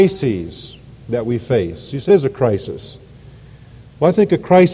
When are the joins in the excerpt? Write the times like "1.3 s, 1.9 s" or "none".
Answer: 2.1 s